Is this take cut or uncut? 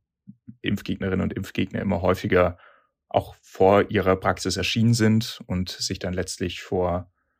uncut